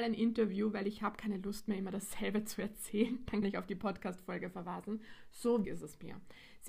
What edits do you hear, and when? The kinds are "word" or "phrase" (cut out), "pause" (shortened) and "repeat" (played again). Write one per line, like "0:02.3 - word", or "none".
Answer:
0:03.4 - word
0:05.6 - word